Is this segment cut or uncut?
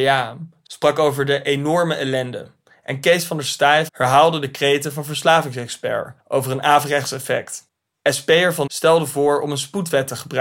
cut